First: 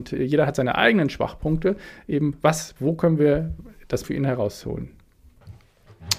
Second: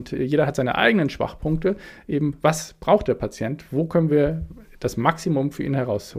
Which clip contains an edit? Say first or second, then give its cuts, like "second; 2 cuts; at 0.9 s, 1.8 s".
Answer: first; 2 cuts; at 2.8 s, 4.0 s